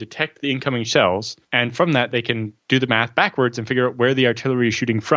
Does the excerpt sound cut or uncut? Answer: cut